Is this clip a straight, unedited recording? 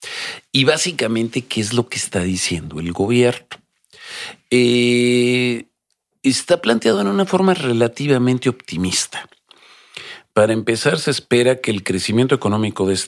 yes; 0 cuts

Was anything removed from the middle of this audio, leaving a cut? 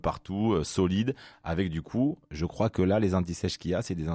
no; 0 cuts

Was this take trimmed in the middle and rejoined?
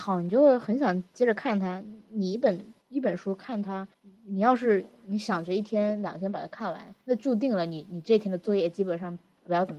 yes; 3 cuts; at 2.8 s, 3.9 s, 7.0 s

